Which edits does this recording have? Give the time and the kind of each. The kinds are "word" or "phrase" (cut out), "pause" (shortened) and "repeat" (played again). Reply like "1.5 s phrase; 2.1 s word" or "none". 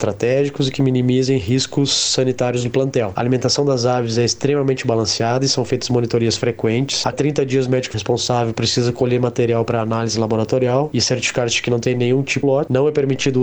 7.1 s word; 7.9 s word; 12.4 s phrase

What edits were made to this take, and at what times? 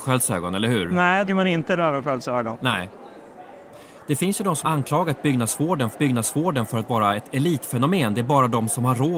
1.3 s phrase; 4.6 s word; 5.9 s repeat

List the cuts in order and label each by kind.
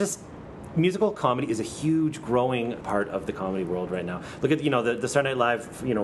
2.8 s word

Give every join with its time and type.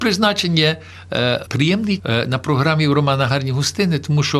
1.5 s word; 2.0 s word

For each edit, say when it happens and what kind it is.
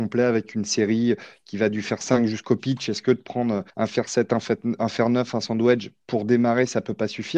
3.7 s pause

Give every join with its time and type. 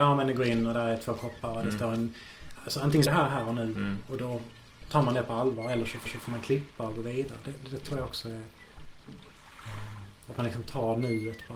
3.1 s phrase; 6.1 s repeat

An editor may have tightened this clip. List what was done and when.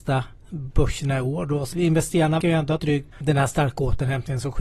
1.7 s word; 2.4 s word; 2.8 s word; 3.1 s word

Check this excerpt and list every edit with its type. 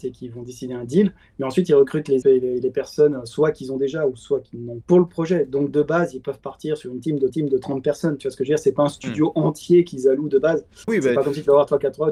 2.2 s word; 4.8 s word; 7.3 s repeat

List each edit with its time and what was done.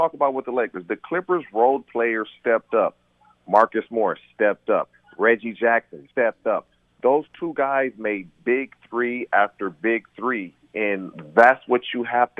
6.1 s pause

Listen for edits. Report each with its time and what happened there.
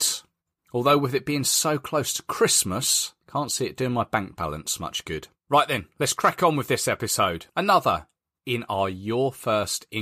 3.2 s pause; 5.4 s pause; 7.5 s pause

